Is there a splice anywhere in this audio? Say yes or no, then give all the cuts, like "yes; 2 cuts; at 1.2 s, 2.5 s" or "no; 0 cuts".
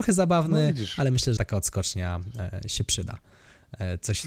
yes; 1 cut; at 1.4 s